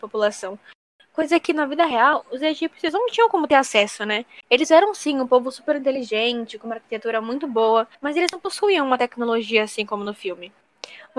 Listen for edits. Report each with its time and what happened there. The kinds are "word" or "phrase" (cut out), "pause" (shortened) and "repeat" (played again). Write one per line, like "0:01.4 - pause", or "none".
0:04.4 - pause
0:07.9 - pause